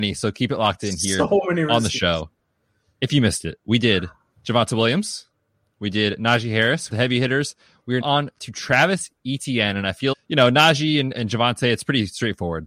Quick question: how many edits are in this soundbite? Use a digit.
3